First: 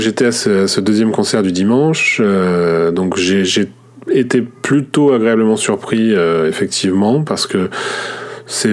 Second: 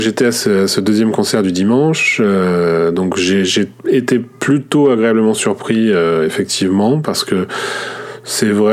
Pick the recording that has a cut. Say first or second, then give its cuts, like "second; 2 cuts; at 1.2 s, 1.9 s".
second; 1 cut; at 3.8 s